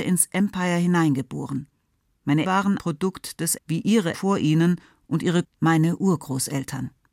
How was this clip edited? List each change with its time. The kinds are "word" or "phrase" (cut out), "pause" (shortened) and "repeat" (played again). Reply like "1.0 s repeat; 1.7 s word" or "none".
2.4 s word; 2.8 s word; 3.6 s word; 4.1 s word; 5.4 s word